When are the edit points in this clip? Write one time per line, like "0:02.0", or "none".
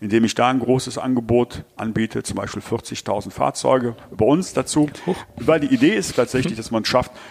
0:06.1